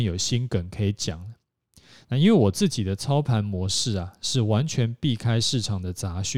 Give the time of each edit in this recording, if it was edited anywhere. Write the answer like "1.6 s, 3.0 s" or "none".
none